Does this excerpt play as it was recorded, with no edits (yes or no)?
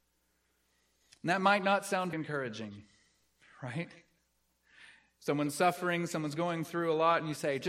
no